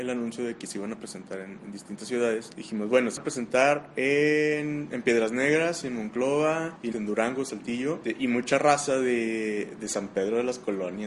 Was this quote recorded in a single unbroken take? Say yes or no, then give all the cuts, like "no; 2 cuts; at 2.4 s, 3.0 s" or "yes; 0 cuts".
no; 2 cuts; at 3.2 s, 6.9 s